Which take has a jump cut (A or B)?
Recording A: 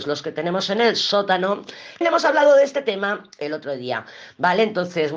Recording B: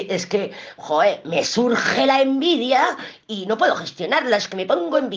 A